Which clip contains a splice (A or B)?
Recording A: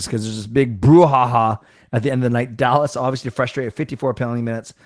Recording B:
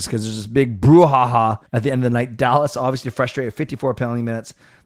B